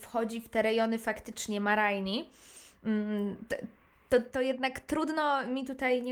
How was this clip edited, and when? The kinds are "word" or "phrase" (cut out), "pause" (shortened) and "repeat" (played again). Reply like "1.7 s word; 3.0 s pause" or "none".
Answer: none